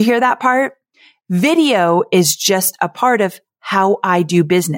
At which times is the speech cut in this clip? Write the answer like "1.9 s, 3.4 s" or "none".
none